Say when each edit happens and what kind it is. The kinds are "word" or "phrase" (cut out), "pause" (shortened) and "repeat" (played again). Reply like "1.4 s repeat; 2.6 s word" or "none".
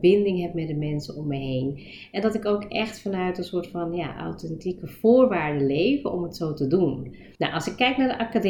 7.3 s pause